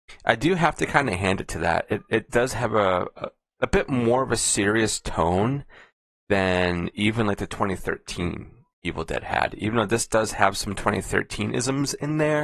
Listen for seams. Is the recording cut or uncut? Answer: uncut